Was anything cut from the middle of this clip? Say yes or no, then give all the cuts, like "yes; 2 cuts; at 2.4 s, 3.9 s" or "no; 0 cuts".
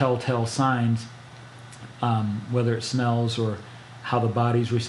no; 0 cuts